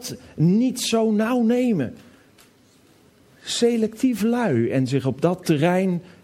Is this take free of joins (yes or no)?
yes